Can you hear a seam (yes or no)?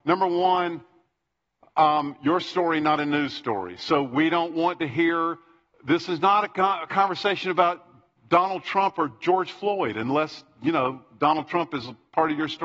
no